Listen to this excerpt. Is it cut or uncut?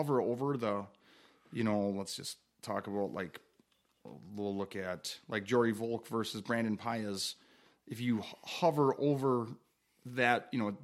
uncut